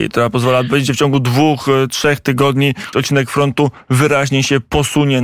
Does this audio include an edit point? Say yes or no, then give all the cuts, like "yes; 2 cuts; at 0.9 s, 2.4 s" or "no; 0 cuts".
yes; 1 cut; at 2.9 s